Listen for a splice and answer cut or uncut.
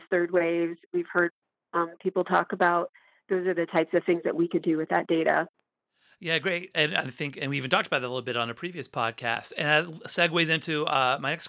uncut